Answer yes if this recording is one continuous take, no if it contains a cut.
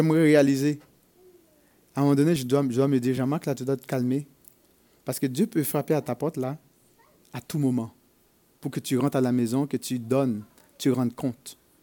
yes